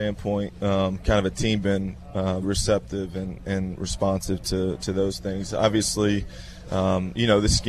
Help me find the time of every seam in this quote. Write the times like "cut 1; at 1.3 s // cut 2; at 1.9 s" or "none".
cut 1; at 1.6 s // cut 2; at 2.4 s